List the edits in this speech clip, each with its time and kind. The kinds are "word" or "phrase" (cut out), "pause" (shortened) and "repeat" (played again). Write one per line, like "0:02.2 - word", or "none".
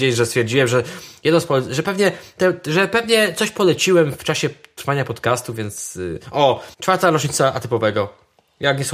0:06.7 - pause